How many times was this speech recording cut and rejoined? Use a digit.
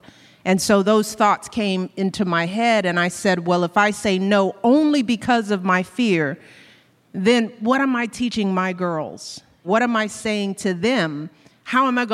0